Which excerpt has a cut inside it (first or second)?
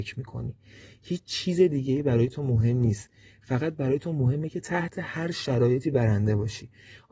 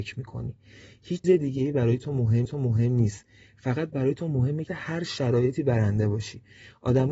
second